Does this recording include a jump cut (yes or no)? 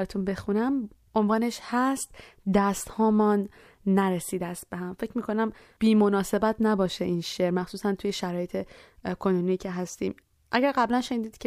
no